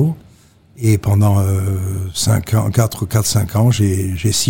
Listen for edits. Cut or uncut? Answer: uncut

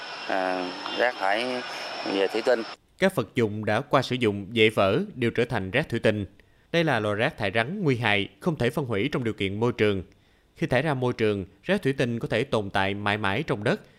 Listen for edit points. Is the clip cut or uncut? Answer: uncut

